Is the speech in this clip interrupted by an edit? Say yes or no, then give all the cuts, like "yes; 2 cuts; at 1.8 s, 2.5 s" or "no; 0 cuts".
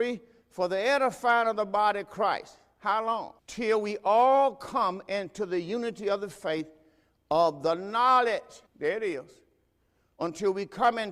yes; 2 cuts; at 3.4 s, 8.7 s